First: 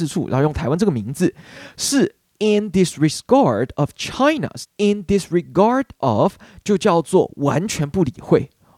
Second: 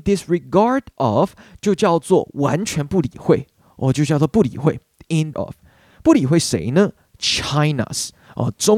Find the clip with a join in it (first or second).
second